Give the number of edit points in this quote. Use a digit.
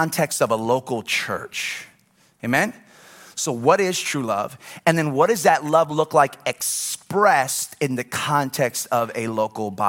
0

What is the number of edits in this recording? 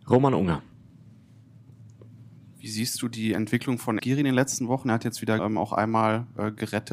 2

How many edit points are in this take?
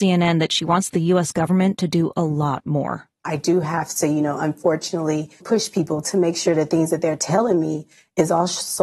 1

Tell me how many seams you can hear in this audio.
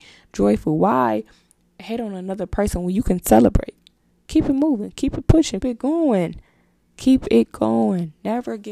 1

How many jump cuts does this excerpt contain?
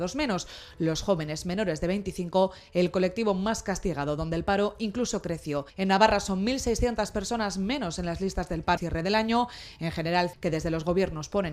3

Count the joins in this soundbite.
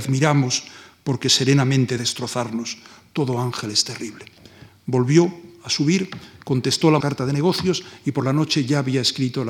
2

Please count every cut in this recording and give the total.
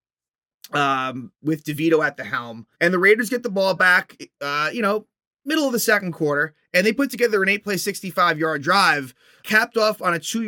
2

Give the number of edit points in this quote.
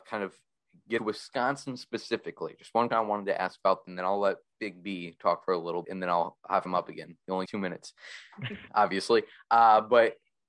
8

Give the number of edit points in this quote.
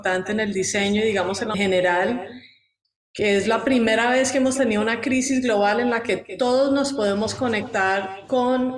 1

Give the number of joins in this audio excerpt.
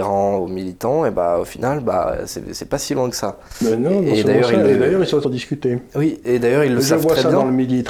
1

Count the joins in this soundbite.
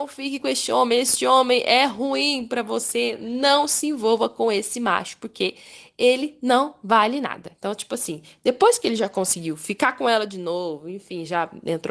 0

